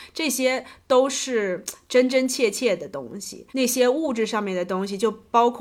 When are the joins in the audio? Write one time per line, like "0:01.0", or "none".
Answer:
0:03.5